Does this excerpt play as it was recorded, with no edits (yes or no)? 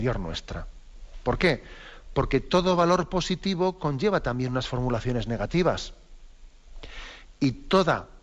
yes